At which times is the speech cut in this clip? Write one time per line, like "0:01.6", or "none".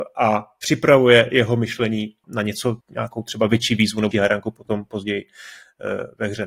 0:02.2
0:02.8
0:04.1